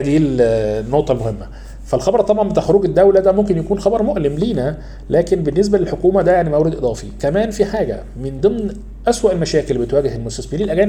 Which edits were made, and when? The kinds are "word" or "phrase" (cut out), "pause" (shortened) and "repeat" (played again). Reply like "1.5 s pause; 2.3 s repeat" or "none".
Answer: none